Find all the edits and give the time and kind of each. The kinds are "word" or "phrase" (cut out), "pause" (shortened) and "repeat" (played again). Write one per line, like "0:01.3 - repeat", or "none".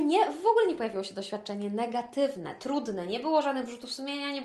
none